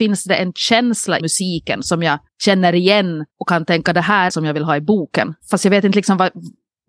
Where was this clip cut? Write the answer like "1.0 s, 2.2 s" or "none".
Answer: 1.2 s, 2.3 s, 3.3 s, 4.3 s, 5.4 s